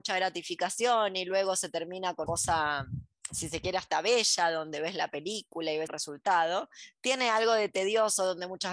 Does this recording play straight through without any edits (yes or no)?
no